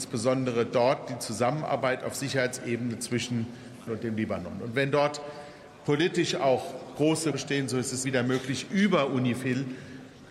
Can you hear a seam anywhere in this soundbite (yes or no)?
yes